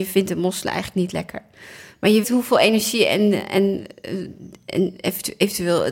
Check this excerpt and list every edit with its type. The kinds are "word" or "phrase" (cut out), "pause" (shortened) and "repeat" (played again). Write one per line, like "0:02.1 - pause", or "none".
0:02.2 - word